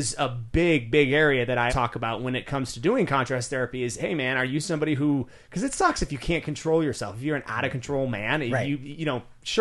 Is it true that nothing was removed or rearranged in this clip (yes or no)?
no